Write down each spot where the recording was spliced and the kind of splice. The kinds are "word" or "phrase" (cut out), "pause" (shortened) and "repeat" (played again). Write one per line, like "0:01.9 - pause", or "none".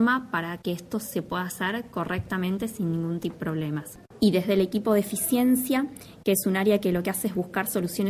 0:03.3 - word